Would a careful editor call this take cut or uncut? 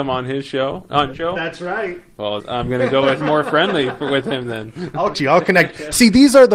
cut